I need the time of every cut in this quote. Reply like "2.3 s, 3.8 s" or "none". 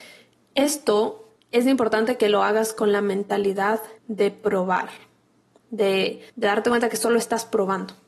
1.4 s, 4.0 s, 6.3 s